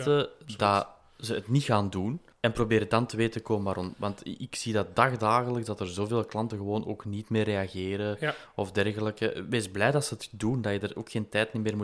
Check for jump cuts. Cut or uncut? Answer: uncut